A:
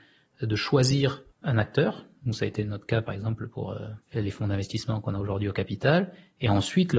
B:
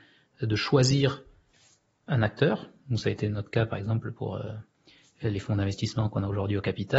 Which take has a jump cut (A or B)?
A